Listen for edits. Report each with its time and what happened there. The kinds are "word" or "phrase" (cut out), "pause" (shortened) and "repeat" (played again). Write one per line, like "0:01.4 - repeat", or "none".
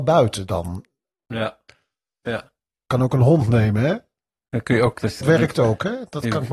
0:05.2 - word